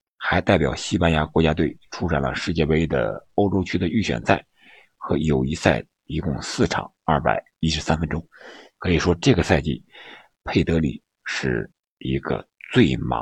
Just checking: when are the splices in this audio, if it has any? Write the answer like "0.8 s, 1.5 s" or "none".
none